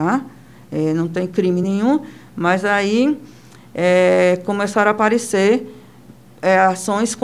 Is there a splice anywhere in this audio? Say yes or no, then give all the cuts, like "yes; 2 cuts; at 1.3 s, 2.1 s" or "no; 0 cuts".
no; 0 cuts